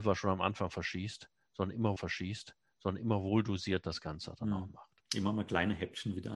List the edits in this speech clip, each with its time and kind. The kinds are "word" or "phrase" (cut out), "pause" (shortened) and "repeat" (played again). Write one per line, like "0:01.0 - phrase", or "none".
0:02.0 - repeat